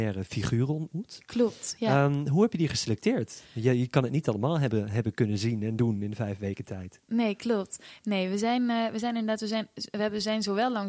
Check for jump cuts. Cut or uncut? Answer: uncut